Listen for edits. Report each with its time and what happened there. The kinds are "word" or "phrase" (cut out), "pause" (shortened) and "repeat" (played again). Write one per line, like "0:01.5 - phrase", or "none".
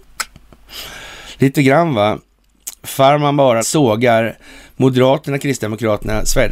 0:03.6 - phrase